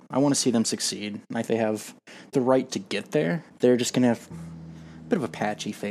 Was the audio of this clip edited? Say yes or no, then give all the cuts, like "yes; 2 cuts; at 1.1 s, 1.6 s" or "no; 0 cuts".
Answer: yes; 5 cuts; at 1.5 s, 2.3 s, 2.7 s, 3.5 s, 4.3 s